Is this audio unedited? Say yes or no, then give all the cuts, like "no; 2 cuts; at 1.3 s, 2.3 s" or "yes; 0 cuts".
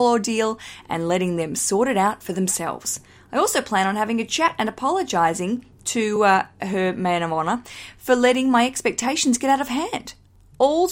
yes; 0 cuts